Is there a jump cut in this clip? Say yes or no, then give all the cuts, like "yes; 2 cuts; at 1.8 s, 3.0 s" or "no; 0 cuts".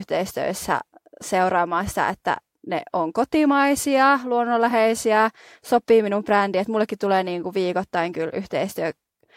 no; 0 cuts